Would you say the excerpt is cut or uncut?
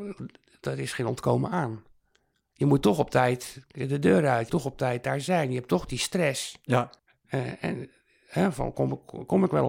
cut